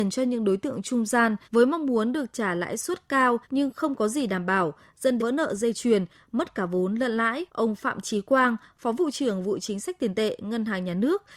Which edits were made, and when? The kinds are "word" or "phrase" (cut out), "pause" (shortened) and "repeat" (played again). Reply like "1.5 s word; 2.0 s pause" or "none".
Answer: 1.4 s pause; 3.4 s pause; 5.2 s phrase; 7.5 s pause